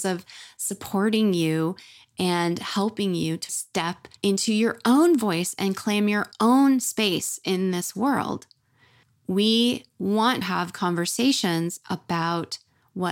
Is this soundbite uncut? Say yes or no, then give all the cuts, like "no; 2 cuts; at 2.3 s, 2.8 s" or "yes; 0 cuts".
no; 4 cuts; at 3.5 s, 4.2 s, 9.0 s, 10.4 s